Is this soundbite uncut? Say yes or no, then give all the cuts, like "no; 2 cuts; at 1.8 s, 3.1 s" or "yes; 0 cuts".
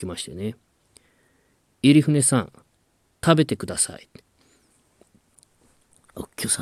yes; 0 cuts